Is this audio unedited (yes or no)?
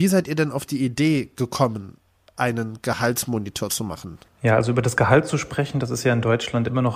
no